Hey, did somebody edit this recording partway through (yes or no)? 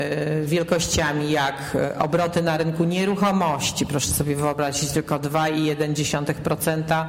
no